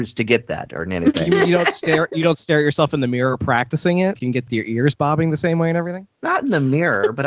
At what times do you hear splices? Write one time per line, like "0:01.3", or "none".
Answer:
0:04.2
0:04.5
0:06.1